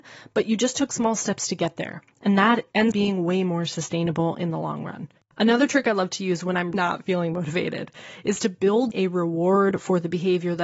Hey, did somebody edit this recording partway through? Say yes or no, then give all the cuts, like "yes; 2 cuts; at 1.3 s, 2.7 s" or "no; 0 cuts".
yes; 4 cuts; at 2.9 s, 5.2 s, 6.7 s, 8.9 s